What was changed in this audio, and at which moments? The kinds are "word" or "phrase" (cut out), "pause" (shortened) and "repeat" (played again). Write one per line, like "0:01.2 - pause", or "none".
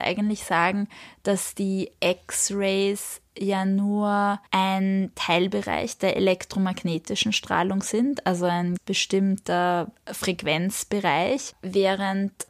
0:04.5 - pause
0:08.8 - word